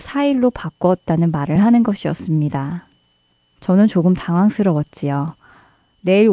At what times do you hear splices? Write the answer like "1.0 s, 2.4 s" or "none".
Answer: none